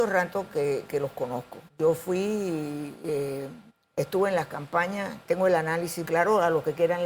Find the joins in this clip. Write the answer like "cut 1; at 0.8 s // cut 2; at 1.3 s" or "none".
cut 1; at 1.7 s // cut 2; at 3.7 s // cut 3; at 5.2 s // cut 4; at 6.0 s